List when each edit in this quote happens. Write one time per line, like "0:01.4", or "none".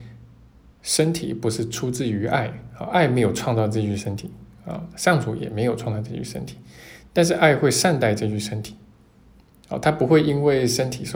none